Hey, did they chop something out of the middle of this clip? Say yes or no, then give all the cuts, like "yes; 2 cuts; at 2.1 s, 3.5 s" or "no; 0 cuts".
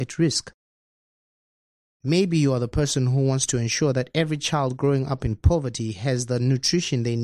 no; 0 cuts